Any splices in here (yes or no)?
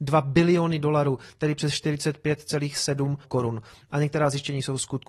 yes